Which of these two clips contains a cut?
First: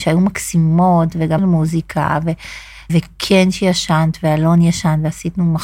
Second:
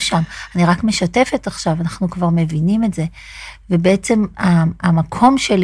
first; 2 cuts; at 1.4 s, 2.9 s

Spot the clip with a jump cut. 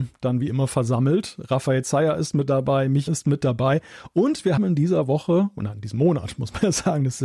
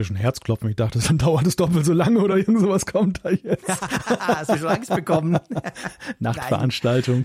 first; 2 cuts; at 3.1 s, 4.6 s

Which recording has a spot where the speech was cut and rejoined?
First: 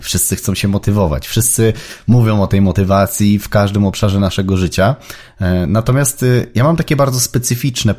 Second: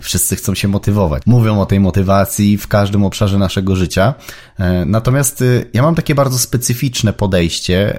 second; 1 cut; at 1.2 s

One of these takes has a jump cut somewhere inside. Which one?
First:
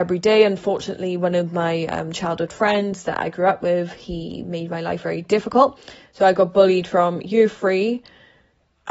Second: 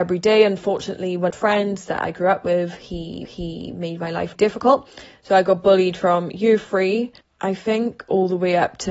second; 4 cuts; at 1.3 s, 3.2 s, 4.3 s, 7.2 s

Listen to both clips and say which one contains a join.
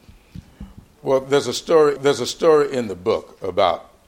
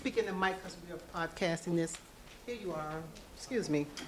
first; 1 cut; at 2.0 s

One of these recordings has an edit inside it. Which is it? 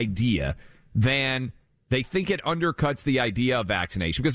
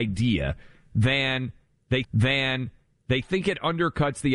second; 1 cut; at 2.0 s

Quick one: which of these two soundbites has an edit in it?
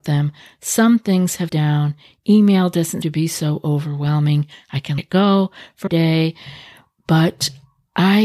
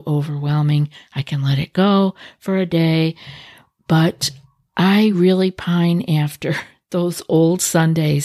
first; 4 cuts; at 1.5 s, 3.0 s, 5.0 s, 5.9 s

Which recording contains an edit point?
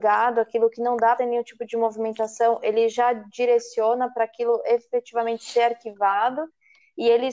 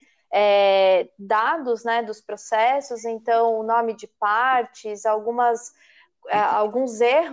first; 1 cut; at 1.2 s

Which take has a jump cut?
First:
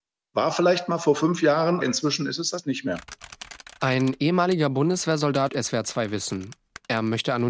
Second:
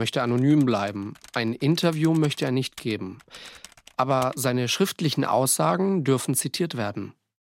first; 3 cuts; at 1.8 s, 3.8 s, 5.5 s

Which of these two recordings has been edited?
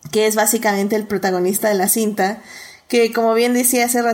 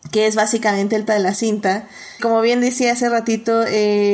second; 2 cuts; at 1.1 s, 2.2 s

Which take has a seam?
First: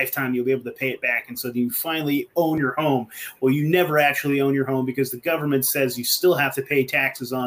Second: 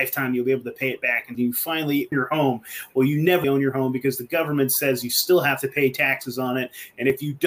second; 3 cuts; at 1.3 s, 2.1 s, 3.4 s

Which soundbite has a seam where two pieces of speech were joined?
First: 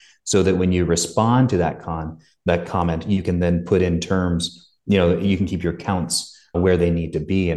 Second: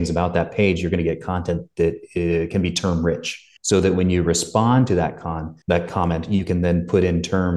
second; 2 cuts; at 3.6 s, 5.6 s

